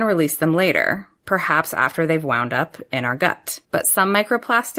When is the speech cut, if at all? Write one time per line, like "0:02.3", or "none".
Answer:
0:03.6